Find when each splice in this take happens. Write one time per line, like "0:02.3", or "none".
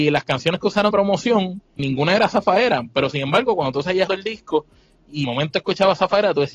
0:00.9
0:01.8
0:04.1
0:05.2

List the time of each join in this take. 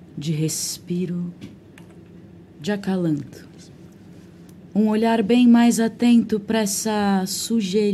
none

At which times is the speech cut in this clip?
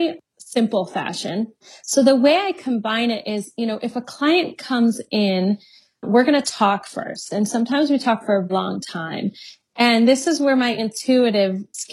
0:08.5

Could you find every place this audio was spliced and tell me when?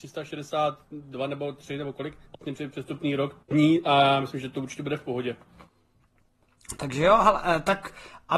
0:02.3
0:03.4

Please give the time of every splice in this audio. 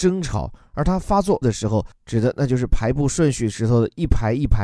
0:01.4

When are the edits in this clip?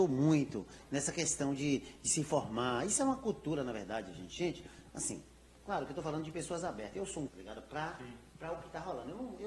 0:07.3

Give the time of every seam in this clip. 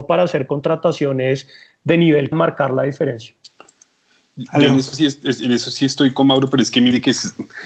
0:02.3

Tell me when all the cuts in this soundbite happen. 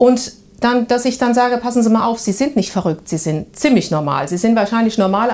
none

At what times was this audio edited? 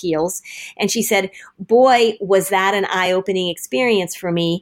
none

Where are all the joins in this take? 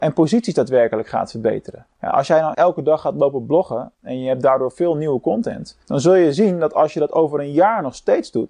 0:01.9
0:02.5
0:05.8

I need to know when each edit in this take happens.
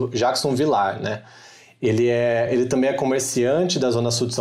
none

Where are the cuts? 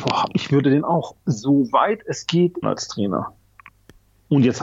0:01.2
0:02.6

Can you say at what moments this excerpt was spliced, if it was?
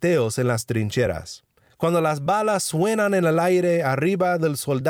none

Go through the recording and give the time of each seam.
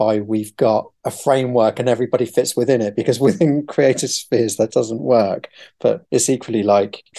0:04.7

